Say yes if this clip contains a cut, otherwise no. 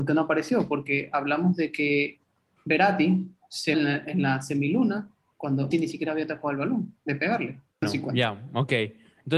yes